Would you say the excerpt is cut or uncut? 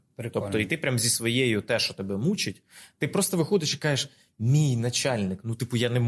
uncut